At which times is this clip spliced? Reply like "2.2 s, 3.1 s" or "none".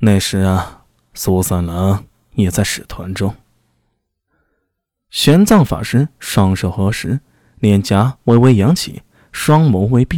none

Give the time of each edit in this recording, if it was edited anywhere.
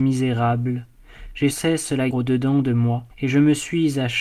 1.5 s, 2.1 s, 3.1 s

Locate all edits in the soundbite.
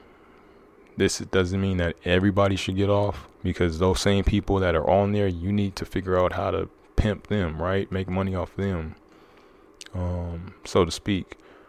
3.3 s, 6.8 s, 10.6 s

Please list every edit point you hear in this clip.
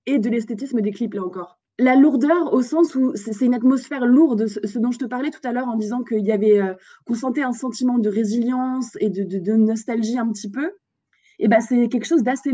none

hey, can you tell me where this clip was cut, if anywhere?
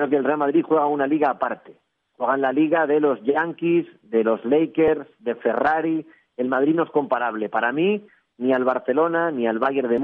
none

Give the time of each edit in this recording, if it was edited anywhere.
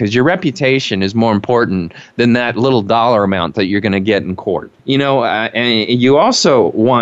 4.8 s

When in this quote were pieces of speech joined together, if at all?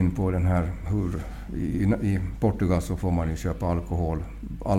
none

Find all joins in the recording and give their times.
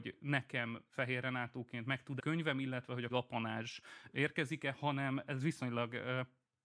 2.2 s, 3.1 s

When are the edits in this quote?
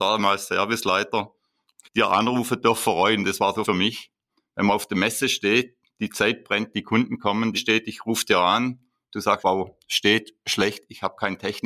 1.8 s, 3.6 s, 7.5 s, 9.4 s

